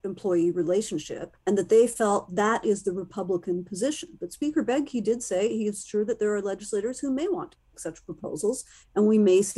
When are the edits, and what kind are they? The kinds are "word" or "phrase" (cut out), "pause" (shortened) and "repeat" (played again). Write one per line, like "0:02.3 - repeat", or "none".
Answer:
0:01.4 - pause